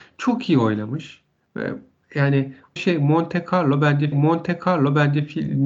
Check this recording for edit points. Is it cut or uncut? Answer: cut